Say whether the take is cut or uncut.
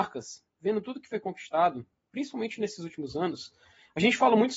uncut